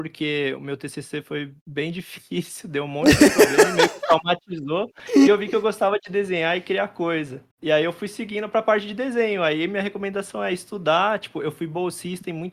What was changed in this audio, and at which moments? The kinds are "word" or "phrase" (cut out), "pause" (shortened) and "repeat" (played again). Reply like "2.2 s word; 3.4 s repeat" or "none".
1.6 s pause; 7.5 s pause